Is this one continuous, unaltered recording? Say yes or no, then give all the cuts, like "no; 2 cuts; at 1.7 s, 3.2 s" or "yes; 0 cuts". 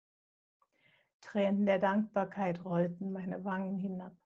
yes; 0 cuts